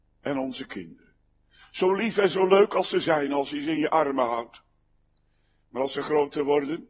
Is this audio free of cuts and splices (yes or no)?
yes